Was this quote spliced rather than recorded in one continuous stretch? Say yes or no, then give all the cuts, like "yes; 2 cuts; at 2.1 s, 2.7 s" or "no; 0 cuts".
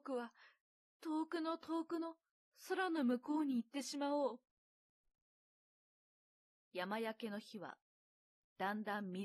no; 0 cuts